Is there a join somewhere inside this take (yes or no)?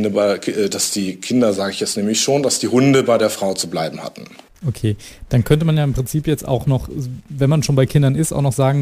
no